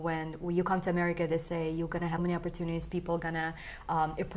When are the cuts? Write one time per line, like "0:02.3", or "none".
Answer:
0:02.2